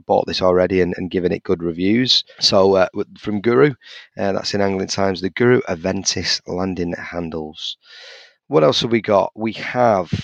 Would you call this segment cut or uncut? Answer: uncut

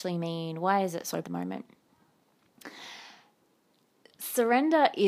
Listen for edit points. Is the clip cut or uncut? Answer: cut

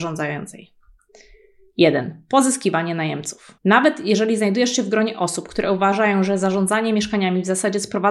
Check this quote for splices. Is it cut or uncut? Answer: cut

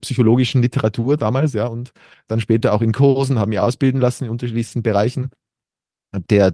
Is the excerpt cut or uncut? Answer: uncut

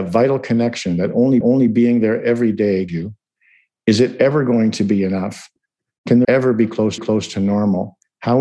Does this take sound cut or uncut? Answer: cut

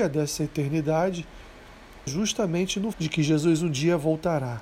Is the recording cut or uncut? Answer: cut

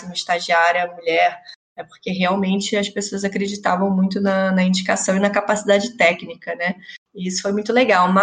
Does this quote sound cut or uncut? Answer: uncut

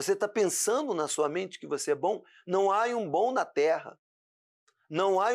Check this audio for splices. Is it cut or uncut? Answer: uncut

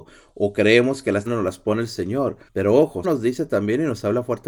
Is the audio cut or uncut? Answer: cut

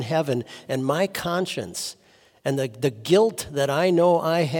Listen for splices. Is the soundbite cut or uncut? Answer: uncut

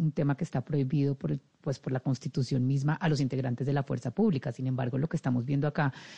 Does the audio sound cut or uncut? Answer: uncut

